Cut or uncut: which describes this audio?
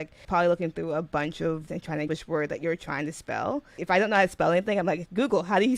cut